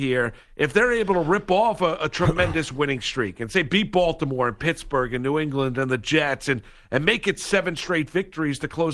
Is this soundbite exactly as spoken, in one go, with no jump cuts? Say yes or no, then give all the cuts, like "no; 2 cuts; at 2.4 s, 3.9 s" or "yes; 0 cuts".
yes; 0 cuts